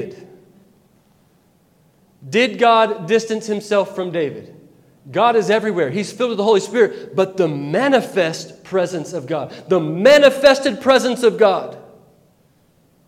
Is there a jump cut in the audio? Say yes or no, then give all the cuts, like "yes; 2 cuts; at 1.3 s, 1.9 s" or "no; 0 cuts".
no; 0 cuts